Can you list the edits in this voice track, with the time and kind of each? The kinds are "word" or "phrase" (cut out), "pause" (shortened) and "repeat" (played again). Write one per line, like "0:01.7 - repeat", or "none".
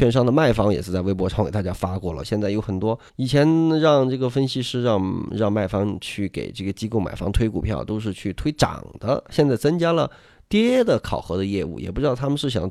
0:03.1 - pause